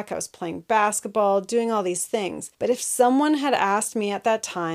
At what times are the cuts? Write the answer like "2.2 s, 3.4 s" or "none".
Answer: 2.5 s